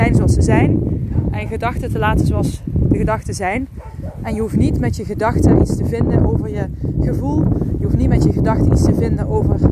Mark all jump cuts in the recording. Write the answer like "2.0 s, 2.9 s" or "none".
none